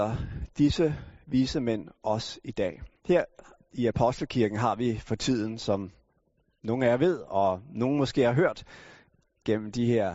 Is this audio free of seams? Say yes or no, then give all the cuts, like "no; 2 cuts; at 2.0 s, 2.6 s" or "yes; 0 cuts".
no; 1 cut; at 3.0 s